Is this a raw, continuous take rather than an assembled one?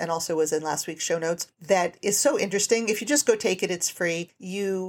yes; 0 cuts

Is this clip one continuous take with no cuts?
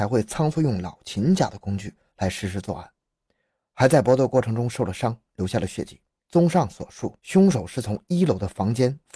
no; 2 cuts; at 6.2 s, 7.2 s

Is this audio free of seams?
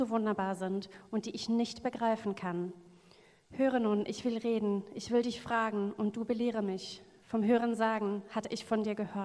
yes; 0 cuts

